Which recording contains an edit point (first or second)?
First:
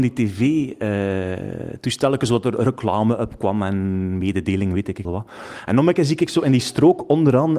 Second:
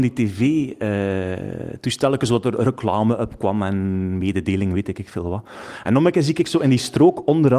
first